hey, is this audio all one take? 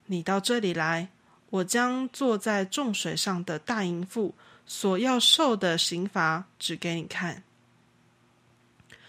yes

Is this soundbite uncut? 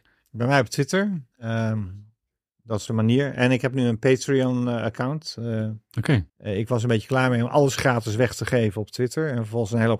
no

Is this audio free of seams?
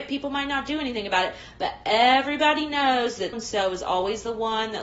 no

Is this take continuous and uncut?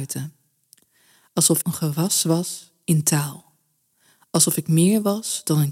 no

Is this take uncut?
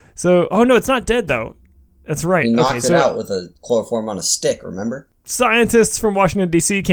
yes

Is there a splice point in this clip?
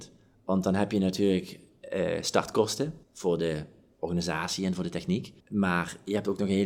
yes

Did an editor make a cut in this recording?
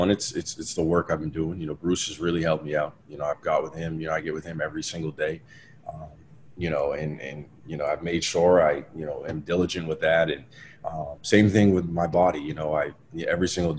no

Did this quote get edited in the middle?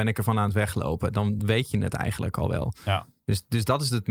no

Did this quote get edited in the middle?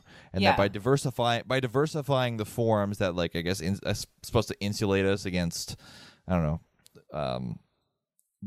no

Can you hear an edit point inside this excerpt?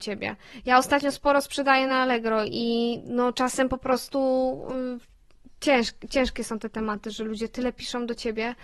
no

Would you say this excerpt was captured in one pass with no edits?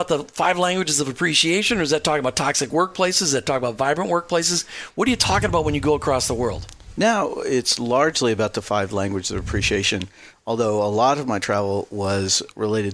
yes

